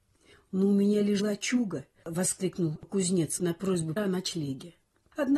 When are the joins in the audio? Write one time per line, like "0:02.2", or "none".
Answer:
0:01.2
0:02.0
0:03.4
0:04.0